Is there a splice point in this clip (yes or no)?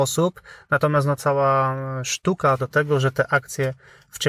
yes